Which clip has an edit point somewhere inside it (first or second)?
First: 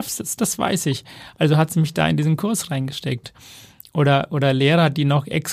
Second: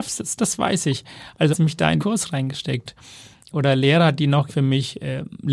second